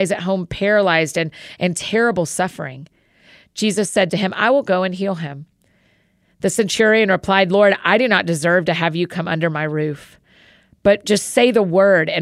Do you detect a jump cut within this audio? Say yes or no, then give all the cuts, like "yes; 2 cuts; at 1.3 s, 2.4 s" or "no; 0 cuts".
no; 0 cuts